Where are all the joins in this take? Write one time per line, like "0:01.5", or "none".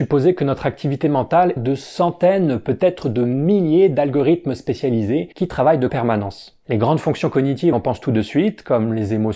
0:01.6
0:05.3
0:05.9
0:07.7